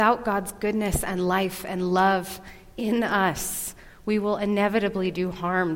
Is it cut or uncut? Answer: uncut